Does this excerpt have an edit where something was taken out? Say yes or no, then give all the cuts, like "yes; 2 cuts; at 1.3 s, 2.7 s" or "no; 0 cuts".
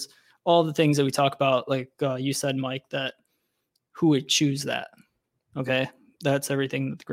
no; 0 cuts